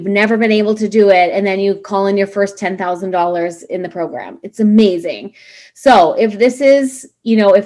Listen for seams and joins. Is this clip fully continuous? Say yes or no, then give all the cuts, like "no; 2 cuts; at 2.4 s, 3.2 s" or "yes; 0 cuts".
yes; 0 cuts